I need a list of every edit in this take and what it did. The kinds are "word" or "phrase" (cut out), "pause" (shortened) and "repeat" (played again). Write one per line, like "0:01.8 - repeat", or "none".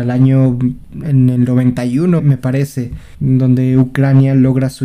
0:02.2 - word
0:03.1 - pause